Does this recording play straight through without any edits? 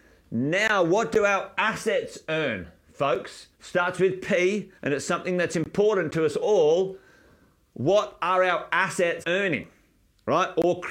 no; 3 cuts; at 3.5 s, 4.8 s, 9.2 s

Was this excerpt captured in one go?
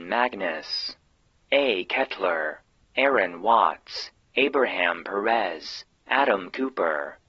yes; 0 cuts

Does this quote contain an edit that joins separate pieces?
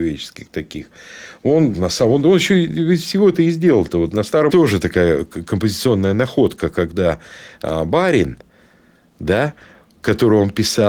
yes; 2 cuts; at 1.7 s, 4.5 s

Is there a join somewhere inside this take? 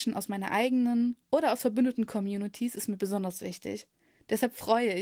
no; 0 cuts

